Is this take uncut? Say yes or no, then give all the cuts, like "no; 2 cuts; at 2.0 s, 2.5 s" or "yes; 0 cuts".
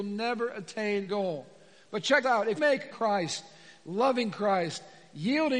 no; 4 cuts; at 1.1 s, 2.2 s, 2.6 s, 2.9 s